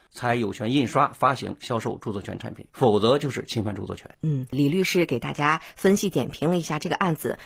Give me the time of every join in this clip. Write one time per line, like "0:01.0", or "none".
0:02.7
0:04.1

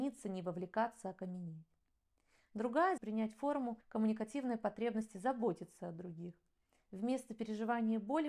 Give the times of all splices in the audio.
0:03.0
0:03.8

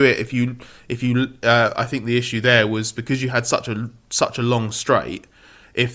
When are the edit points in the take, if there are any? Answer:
none

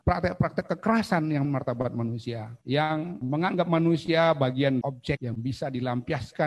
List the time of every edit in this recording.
0:01.4
0:04.8

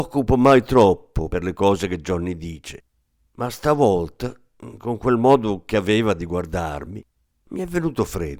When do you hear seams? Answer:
none

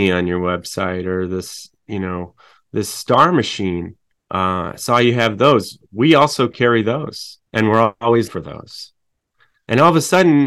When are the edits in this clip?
0:04.2
0:07.5
0:08.3

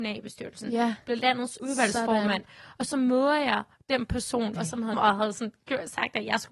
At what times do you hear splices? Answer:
0:01.6
0:04.6
0:04.9

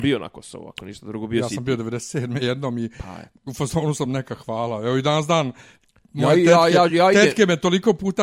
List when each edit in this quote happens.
none

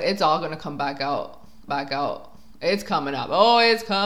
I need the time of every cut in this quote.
0:01.7

